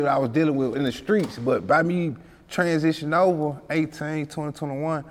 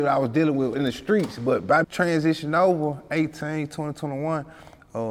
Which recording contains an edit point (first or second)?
second